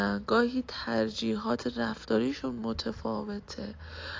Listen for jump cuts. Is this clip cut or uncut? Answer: uncut